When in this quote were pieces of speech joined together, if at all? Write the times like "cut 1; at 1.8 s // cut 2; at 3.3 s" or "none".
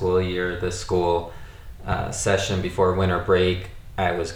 none